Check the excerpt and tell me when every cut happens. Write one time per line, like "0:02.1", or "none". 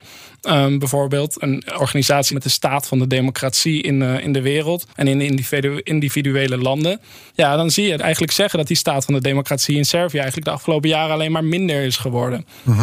0:01.4
0:02.3
0:04.9
0:07.3
0:08.0